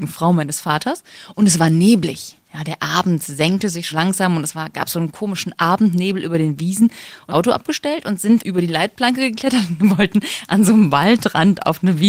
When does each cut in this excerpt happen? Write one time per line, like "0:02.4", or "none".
0:03.9
0:07.3
0:08.4